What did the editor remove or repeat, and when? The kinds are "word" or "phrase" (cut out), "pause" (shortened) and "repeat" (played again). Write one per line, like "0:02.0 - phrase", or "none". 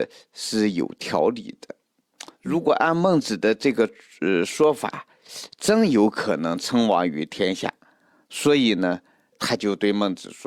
none